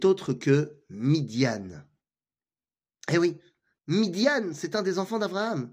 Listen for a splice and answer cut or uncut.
uncut